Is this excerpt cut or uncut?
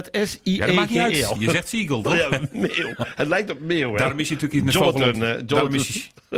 uncut